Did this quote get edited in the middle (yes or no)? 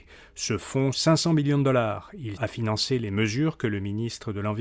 yes